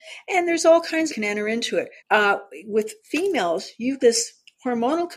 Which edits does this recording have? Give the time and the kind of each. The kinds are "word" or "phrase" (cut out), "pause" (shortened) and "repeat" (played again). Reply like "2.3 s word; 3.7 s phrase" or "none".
1.1 s phrase; 2.0 s pause; 3.0 s word; 4.0 s word